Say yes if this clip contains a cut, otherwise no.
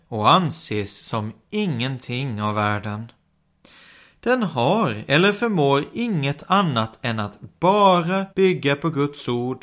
yes